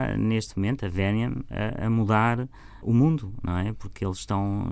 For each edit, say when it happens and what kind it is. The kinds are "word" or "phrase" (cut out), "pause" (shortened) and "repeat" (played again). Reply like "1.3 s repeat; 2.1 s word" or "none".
2.8 s word